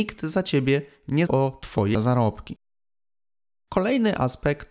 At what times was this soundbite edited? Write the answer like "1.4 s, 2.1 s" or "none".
1.3 s, 1.9 s